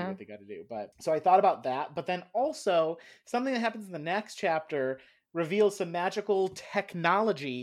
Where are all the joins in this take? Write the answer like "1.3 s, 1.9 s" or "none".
none